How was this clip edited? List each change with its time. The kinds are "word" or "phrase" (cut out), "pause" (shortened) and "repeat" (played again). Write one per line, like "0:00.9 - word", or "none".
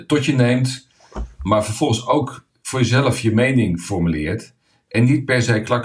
none